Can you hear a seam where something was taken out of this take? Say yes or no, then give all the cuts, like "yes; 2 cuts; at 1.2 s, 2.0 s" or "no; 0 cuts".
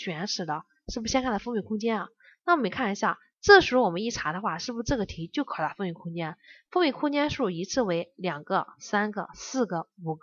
no; 0 cuts